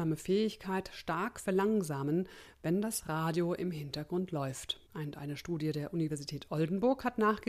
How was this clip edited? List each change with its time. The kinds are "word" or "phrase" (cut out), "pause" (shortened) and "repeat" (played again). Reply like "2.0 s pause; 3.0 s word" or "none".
4.9 s pause